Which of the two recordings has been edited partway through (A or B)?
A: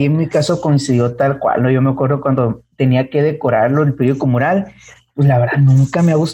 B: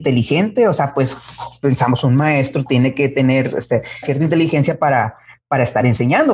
B